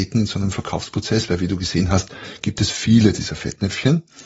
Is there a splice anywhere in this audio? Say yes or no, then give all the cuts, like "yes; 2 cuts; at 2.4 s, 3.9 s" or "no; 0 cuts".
no; 0 cuts